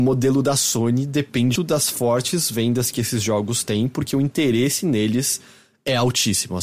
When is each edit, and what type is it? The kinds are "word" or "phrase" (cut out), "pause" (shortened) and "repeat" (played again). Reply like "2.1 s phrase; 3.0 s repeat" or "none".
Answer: 1.6 s word